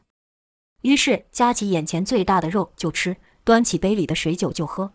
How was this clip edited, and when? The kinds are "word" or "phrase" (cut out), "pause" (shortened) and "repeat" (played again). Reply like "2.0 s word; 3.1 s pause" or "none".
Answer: none